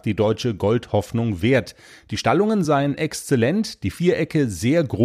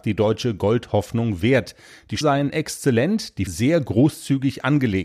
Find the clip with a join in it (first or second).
second